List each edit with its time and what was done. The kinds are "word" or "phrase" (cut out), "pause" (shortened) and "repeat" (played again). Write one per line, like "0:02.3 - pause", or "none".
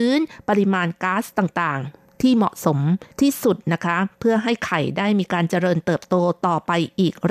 0:03.1 - pause